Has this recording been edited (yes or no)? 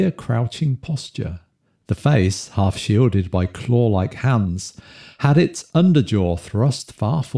no